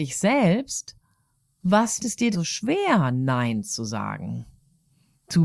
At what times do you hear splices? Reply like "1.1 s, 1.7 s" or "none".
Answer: 2.0 s, 2.3 s